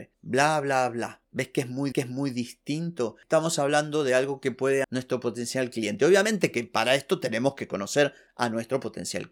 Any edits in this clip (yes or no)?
yes